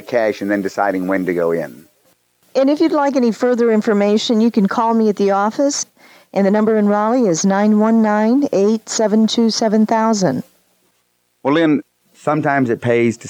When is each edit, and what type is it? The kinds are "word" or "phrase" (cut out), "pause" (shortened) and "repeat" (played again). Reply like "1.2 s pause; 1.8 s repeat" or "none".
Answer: none